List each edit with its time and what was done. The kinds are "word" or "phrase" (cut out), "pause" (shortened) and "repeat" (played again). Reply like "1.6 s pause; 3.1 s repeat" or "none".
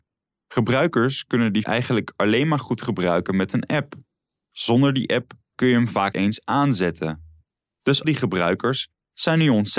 1.6 s word; 6.1 s word; 8.0 s word